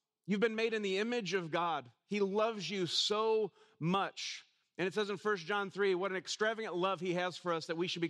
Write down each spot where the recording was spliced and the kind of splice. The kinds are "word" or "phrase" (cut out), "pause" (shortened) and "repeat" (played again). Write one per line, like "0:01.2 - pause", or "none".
none